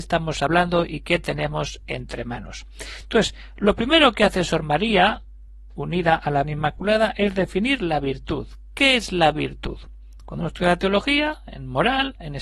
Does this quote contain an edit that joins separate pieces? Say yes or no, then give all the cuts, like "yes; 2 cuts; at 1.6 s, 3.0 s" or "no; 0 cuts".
yes; 1 cut; at 6.4 s